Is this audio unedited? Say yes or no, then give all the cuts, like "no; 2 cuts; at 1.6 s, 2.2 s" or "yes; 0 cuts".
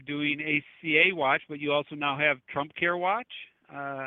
yes; 0 cuts